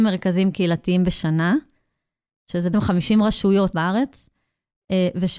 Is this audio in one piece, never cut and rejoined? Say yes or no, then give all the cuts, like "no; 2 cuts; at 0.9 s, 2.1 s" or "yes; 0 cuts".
no; 2 cuts; at 2.7 s, 3.7 s